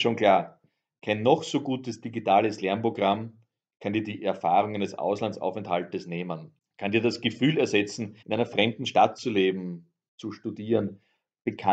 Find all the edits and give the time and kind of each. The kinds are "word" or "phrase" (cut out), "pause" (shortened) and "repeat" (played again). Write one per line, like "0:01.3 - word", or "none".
0:08.2 - pause

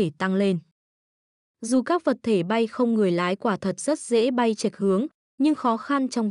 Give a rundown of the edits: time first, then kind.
none

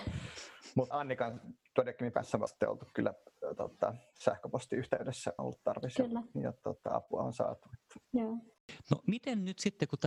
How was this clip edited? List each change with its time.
0:00.9 - word
0:02.1 - word
0:02.5 - word
0:05.4 - phrase
0:08.0 - pause

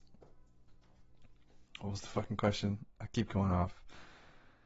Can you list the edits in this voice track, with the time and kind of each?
none

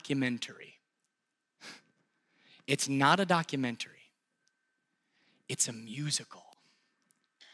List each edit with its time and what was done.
none

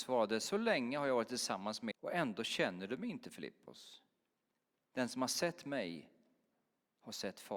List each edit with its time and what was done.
0:01.9 - word

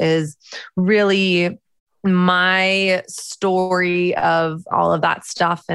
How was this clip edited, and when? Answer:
0:01.6 - pause
0:04.7 - word

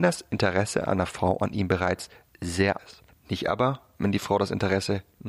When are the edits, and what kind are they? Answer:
0:02.8 - word

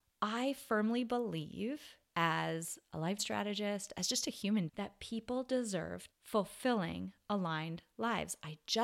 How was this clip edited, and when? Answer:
0:02.1 - pause
0:03.2 - word
0:03.9 - phrase
0:04.7 - word
0:06.1 - phrase

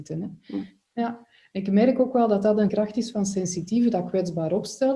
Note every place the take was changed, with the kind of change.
0:02.7 - word

